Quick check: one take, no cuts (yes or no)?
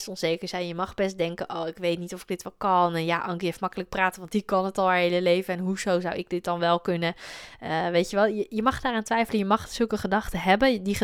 yes